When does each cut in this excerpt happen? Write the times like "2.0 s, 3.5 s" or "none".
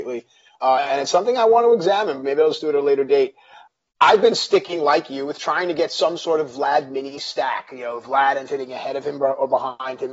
8.5 s